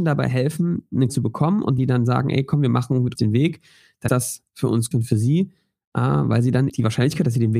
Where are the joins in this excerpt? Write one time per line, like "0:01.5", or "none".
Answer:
0:01.1
0:01.8
0:03.2
0:04.1
0:04.9
0:06.7